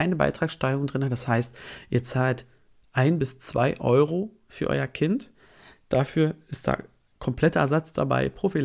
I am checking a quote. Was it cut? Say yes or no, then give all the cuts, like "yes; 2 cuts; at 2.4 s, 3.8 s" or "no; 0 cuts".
no; 0 cuts